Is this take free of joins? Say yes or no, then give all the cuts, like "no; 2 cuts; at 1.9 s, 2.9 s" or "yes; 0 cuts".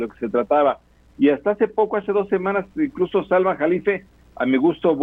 yes; 0 cuts